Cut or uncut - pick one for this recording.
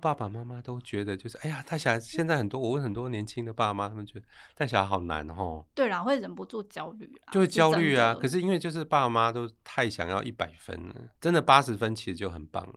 cut